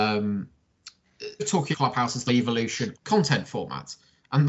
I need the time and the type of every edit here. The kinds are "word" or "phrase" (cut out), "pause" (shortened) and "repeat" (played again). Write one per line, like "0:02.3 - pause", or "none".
0:01.4 - word
0:01.7 - word
0:02.3 - word
0:02.9 - word